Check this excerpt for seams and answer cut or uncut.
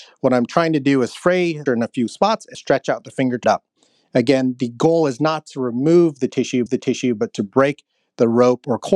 cut